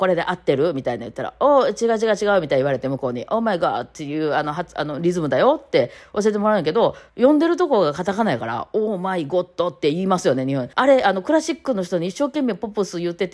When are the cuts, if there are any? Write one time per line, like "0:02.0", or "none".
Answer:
0:07.1
0:10.7